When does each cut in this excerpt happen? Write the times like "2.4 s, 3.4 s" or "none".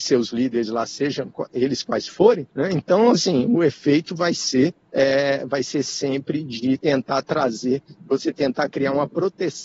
2.5 s, 4.8 s